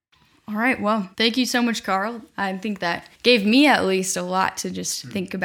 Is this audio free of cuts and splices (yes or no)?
no